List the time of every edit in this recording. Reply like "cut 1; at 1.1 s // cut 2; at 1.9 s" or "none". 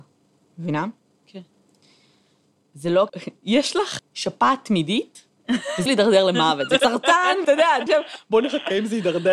cut 1; at 3.1 s // cut 2; at 4.0 s // cut 3; at 5.9 s // cut 4; at 6.8 s // cut 5; at 7.4 s // cut 6; at 7.9 s